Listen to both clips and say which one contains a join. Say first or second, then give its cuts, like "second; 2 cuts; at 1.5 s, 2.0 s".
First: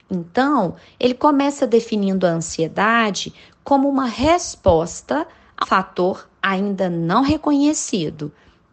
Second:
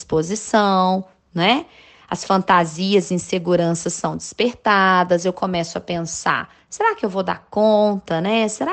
first; 1 cut; at 5.6 s